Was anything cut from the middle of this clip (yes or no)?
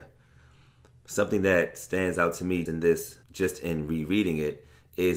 yes